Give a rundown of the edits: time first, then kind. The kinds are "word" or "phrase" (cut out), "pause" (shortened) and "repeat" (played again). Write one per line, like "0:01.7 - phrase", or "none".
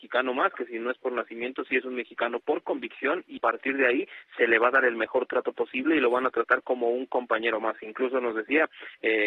0:03.4 - word

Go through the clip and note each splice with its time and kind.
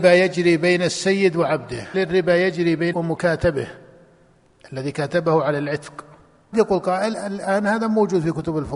0:01.9 - word
0:02.9 - word
0:06.5 - word
0:07.1 - word

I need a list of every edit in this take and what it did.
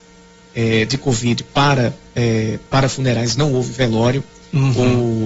0:02.7 - pause

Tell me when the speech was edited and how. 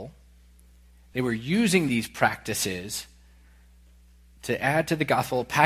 none

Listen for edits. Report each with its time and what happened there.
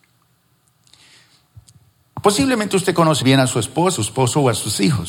0:03.2 - word
0:04.0 - phrase

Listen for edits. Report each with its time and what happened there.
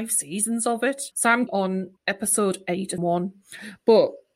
0:01.1 - pause
0:01.5 - word
0:02.0 - pause
0:03.0 - word

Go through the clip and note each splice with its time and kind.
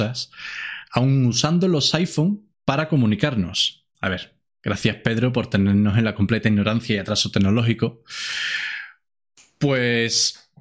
0:02.5 - pause
0:03.9 - pause

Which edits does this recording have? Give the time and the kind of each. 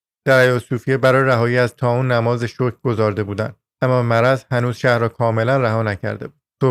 none

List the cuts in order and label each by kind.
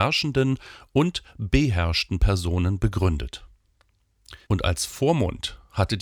0:04.4 - pause

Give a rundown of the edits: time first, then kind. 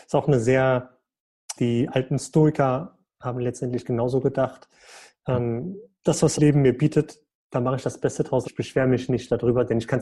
0:01.6 - word
0:06.4 - word
0:08.4 - word

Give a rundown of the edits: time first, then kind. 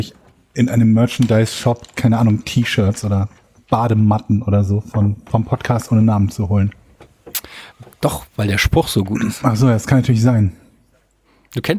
none

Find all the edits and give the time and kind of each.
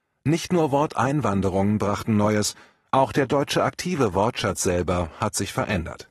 none

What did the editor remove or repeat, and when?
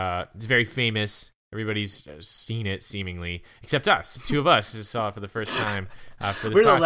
0:04.2 - word

